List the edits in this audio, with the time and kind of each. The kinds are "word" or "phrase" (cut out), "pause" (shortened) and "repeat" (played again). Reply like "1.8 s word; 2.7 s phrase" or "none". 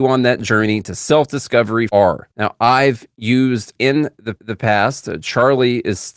1.9 s phrase; 2.3 s pause; 3.7 s word; 4.4 s repeat

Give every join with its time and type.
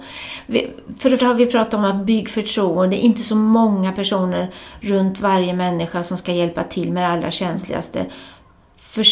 1.2 s word

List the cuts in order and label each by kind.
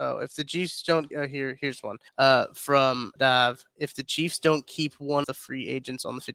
1.1 s word; 2.1 s pause; 3.2 s word; 5.2 s word

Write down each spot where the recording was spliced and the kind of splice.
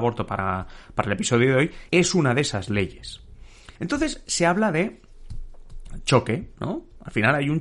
1.9 s pause; 3.8 s pause

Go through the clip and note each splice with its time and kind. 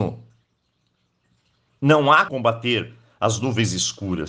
2.3 s word

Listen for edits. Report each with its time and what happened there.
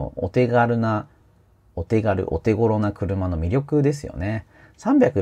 none

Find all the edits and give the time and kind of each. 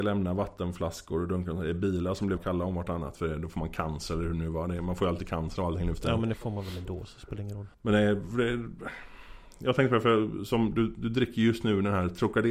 2.4 s phrase; 7.7 s pause

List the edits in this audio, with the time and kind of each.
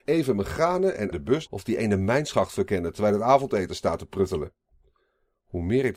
1.1 s phrase; 1.5 s phrase

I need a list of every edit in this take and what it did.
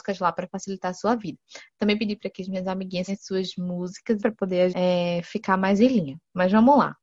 3.1 s word; 4.2 s word; 4.7 s word

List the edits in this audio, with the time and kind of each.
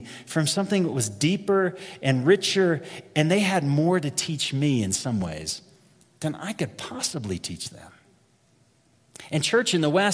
none

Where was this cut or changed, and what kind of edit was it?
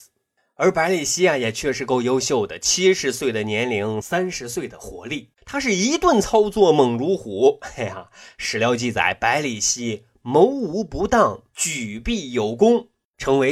5.3 s pause; 11.5 s pause

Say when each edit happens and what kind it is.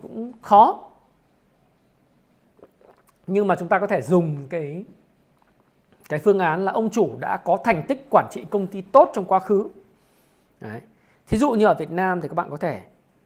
none

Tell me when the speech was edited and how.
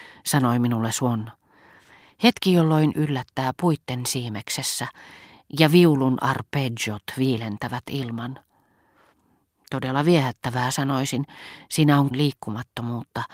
2.9 s word; 12.1 s word

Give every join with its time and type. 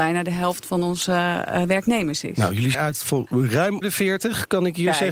2.7 s phrase; 3.8 s word

